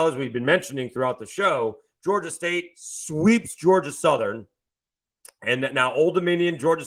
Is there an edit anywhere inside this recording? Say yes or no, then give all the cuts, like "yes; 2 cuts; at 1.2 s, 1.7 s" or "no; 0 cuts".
no; 0 cuts